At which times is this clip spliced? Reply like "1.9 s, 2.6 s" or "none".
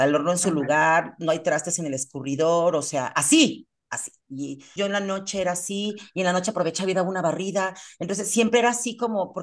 4.8 s